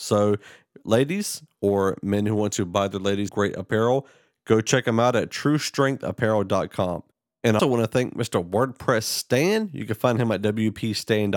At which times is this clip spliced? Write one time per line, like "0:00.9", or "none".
0:03.3
0:07.6